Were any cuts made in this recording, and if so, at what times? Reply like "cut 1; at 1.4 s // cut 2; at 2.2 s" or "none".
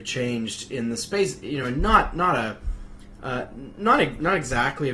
none